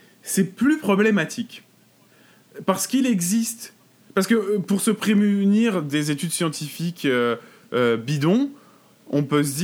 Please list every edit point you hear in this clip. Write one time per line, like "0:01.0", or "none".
none